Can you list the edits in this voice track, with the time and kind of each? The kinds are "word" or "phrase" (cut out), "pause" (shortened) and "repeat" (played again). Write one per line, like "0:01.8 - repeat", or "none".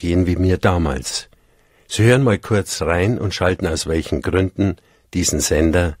none